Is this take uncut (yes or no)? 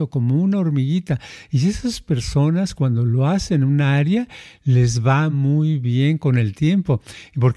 yes